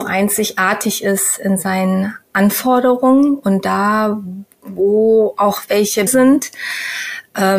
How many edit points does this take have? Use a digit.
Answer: 1